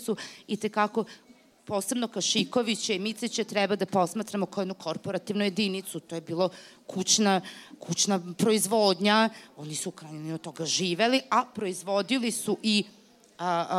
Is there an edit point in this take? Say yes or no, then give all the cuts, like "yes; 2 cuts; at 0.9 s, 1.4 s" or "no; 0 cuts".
no; 0 cuts